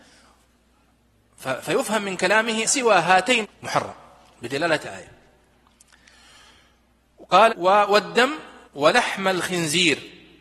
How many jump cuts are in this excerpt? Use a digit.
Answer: 5